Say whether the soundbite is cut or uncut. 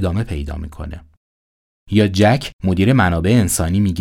uncut